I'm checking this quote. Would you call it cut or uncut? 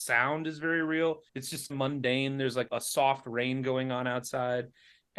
cut